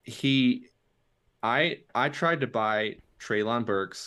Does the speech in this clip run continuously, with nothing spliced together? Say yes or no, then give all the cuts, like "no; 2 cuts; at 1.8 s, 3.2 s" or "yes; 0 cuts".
no; 1 cut; at 1.9 s